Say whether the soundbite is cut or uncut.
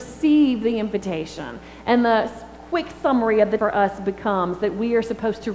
cut